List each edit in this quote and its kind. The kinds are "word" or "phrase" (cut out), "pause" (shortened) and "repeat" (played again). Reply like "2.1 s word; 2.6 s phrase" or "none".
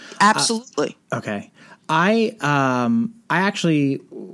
1.0 s pause